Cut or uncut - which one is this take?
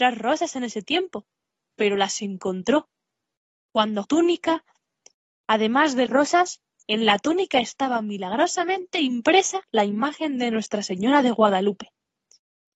cut